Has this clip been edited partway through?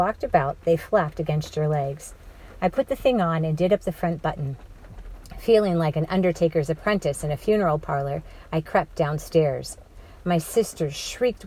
no; 0 cuts

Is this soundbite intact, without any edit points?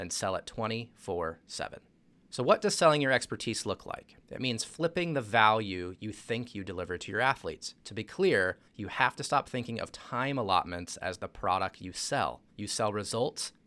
no; 5 cuts; at 2.1 s, 4.2 s, 7.8 s, 8.7 s, 12.5 s

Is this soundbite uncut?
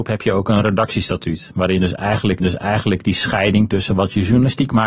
no; 1 cut; at 2.4 s

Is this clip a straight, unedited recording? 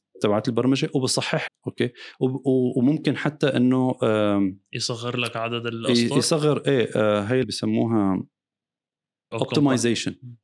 no; 3 cuts; at 1.5 s, 7.4 s, 9.3 s

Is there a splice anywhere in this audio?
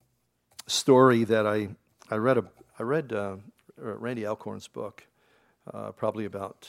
no; 0 cuts

